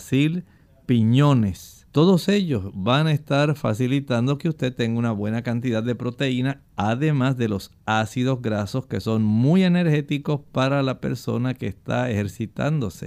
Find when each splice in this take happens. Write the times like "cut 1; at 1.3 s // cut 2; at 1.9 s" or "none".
cut 1; at 1.9 s